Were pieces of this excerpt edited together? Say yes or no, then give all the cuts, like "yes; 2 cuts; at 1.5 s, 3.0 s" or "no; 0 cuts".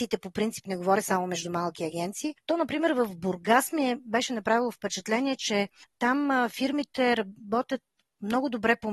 no; 0 cuts